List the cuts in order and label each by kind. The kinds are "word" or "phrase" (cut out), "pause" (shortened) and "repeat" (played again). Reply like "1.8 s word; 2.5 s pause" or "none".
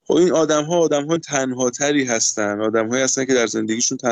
1.2 s word